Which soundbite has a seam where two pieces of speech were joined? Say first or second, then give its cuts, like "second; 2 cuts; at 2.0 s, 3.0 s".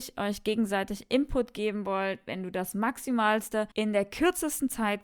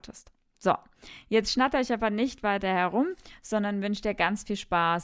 first; 1 cut; at 3.7 s